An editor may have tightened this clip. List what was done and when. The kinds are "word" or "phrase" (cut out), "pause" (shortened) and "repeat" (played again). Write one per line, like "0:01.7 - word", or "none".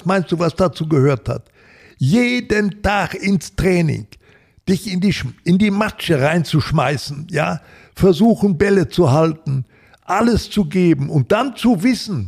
none